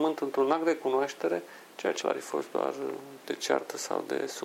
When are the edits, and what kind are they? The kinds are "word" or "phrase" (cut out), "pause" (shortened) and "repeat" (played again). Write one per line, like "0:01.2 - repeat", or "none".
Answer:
0:02.0 - word
0:03.2 - word

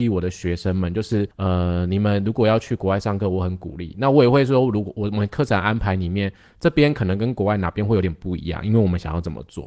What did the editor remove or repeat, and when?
0:01.3 - pause

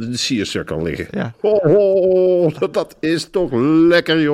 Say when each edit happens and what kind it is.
none

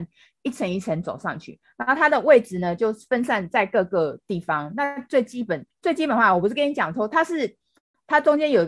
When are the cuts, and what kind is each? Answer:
0:05.7 - pause

